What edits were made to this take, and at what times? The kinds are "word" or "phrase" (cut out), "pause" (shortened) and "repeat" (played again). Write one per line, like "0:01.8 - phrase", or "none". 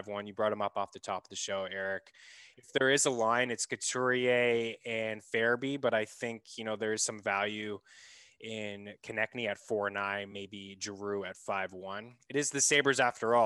none